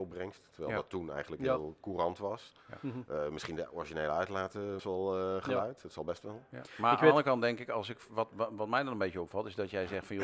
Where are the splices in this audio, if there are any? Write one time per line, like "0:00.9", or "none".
0:04.8

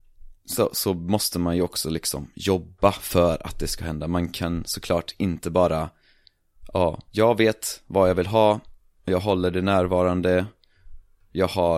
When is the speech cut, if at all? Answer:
0:07.1

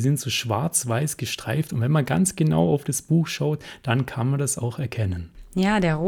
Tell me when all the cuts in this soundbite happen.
none

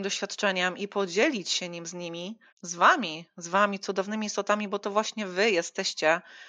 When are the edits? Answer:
0:02.5

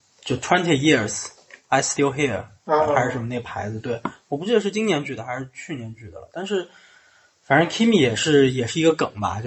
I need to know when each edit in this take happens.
none

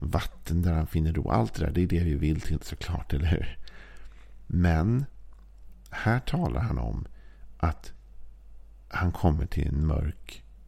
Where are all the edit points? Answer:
none

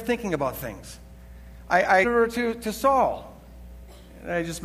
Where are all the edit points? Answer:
0:02.0

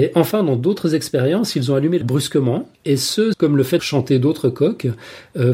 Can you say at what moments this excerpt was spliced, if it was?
0:02.0
0:02.7
0:03.3
0:03.8

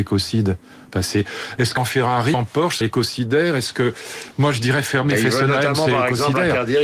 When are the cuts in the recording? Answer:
0:01.8
0:02.3
0:02.8

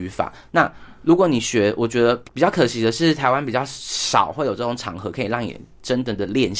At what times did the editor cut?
0:02.3

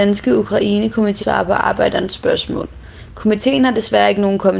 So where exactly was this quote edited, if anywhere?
0:01.2

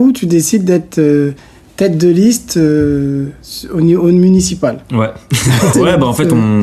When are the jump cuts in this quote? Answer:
0:05.7

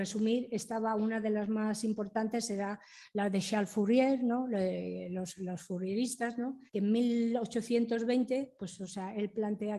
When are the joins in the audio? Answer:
0:06.7

